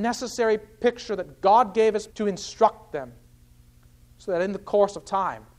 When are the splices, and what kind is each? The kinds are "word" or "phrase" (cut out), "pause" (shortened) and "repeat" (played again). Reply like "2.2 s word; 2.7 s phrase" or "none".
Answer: 2.1 s word